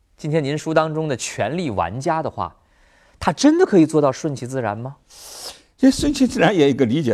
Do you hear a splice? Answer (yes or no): no